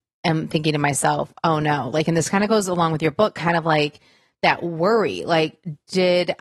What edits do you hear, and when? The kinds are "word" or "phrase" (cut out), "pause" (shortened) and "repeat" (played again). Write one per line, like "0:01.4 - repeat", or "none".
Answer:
none